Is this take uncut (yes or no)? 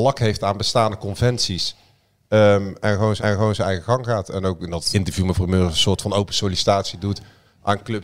no